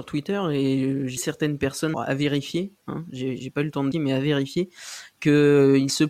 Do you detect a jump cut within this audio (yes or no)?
yes